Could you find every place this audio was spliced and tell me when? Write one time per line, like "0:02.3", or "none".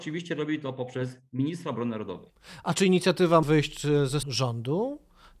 0:03.4
0:04.2

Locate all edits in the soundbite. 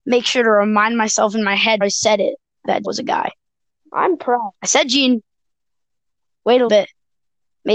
0:01.8
0:02.8
0:06.7

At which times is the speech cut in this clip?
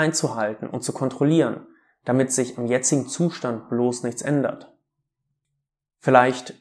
none

